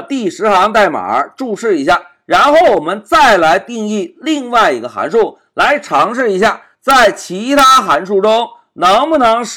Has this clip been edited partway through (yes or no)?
no